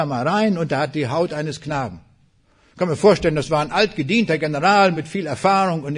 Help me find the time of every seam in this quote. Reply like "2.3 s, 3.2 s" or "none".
none